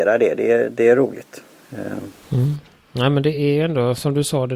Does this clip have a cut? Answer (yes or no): no